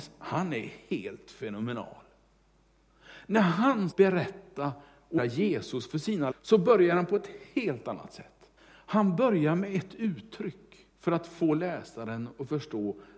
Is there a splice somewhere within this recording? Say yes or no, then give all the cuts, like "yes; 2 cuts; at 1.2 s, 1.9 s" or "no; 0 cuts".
yes; 5 cuts; at 3.9 s, 5.2 s, 6.3 s, 8.6 s, 10.9 s